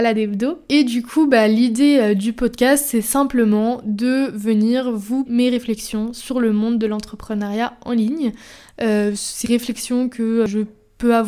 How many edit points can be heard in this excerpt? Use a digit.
2